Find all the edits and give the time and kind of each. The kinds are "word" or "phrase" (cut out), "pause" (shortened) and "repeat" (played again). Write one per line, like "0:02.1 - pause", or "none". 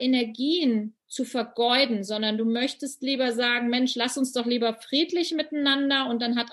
none

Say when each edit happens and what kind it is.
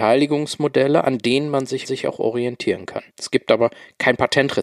0:01.8 - repeat
0:03.1 - pause

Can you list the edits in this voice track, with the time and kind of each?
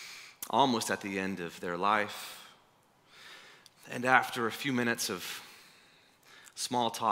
none

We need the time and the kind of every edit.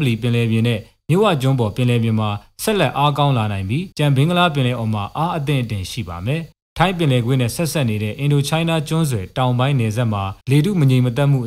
0:03.9 - pause
0:06.5 - pause
0:10.4 - pause

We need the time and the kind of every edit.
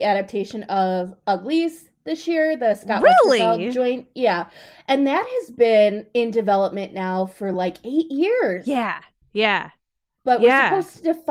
none

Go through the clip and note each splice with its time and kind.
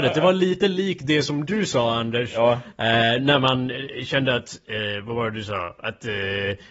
none

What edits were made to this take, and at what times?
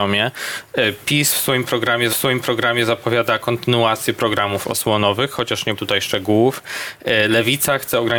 0:02.1 - repeat
0:05.8 - word

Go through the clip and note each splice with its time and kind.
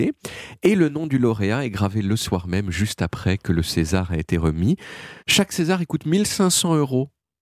0:05.2 - pause

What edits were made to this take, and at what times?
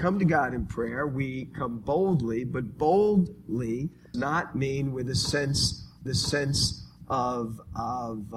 0:04.1 - word
0:06.1 - repeat

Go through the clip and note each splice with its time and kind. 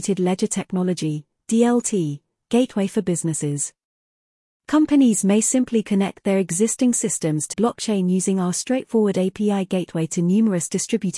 0:07.5 - word

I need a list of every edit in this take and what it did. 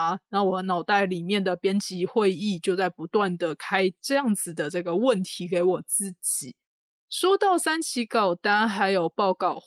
none

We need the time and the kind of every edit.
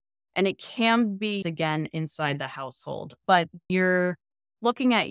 0:01.4 - word
0:03.7 - word

